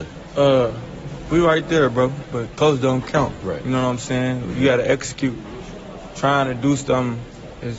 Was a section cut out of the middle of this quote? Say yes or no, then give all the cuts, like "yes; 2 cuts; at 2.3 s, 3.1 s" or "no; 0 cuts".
no; 0 cuts